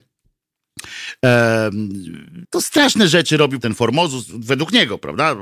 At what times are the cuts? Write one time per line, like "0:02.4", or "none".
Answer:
0:02.4
0:03.6